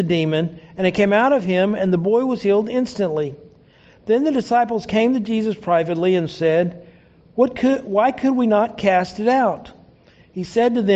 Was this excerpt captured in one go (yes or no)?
yes